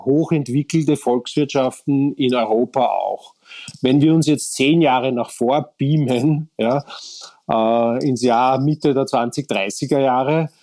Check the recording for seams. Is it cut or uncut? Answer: uncut